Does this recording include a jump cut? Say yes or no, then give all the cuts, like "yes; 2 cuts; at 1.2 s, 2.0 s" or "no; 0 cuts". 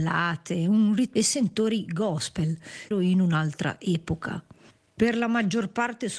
yes; 2 cuts; at 1.1 s, 2.9 s